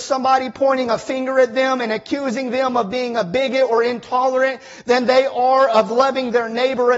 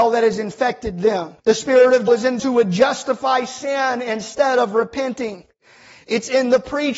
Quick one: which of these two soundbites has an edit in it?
second; 3 cuts; at 1.4 s, 2.1 s, 2.4 s

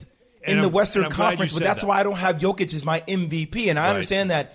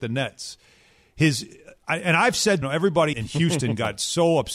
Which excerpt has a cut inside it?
second; 2 cuts; at 2.6 s, 3.1 s

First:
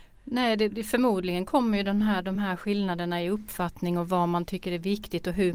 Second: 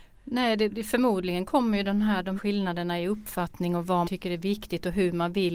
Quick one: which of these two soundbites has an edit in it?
second; 2 cuts; at 2.4 s, 4.0 s

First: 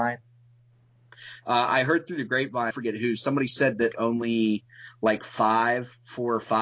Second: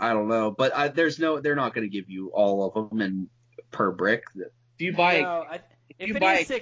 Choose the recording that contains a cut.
first; 2 cuts; at 2.7 s, 3.9 s

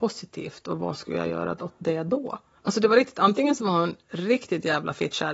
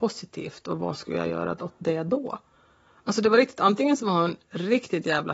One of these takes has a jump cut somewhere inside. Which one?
first; 1 cut; at 2.6 s

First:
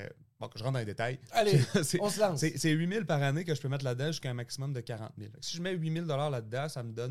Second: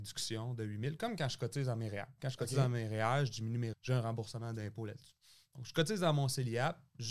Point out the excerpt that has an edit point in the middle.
second; 1 cut; at 3.7 s

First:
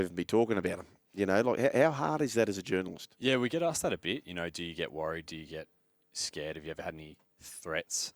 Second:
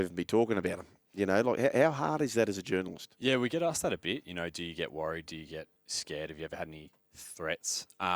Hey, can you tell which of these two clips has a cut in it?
second; 1 cut; at 5.8 s

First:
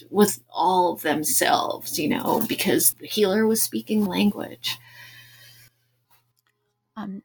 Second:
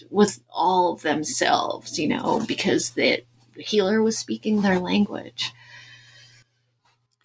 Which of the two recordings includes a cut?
first; 2 cuts; at 2.9 s, 4.1 s

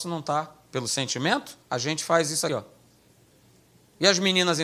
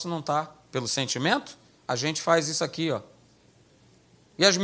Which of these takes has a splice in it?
first; 2 cuts; at 1.6 s, 2.5 s

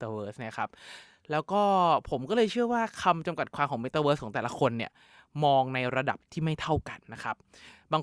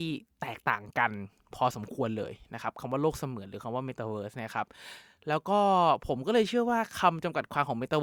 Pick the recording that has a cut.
first; 1 cut; at 7.0 s

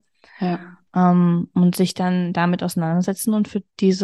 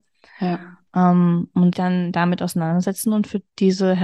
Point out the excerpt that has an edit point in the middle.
second; 1 cut; at 1.7 s

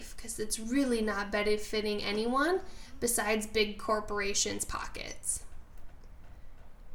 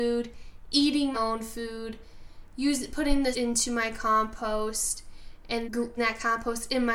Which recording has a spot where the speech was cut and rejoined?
second; 4 cuts; at 1.1 s, 3.3 s, 5.6 s, 6.0 s

